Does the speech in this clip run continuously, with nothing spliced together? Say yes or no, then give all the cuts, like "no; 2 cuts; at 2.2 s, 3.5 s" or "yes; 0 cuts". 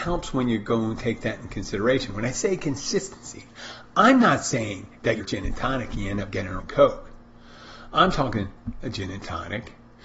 no; 2 cuts; at 5.2 s, 6.6 s